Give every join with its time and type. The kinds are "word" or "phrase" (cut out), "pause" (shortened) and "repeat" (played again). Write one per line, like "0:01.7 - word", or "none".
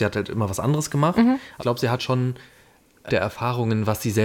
0:01.6 - word
0:02.0 - word
0:03.1 - word